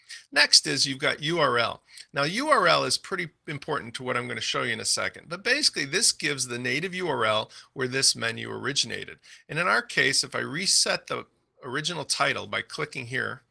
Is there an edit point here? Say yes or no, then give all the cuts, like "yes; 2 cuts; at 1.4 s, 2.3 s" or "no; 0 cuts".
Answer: no; 0 cuts